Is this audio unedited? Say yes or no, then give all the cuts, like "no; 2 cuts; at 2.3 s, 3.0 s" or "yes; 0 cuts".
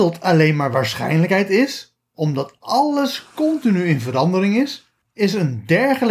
no; 1 cut; at 5.0 s